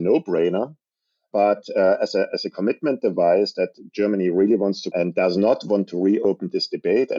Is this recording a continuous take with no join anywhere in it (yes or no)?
no